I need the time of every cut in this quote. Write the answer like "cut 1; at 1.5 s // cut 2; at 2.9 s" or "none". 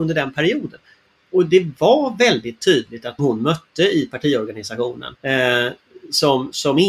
cut 1; at 3.2 s // cut 2; at 5.2 s